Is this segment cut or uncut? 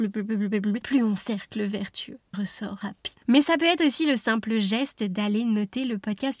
cut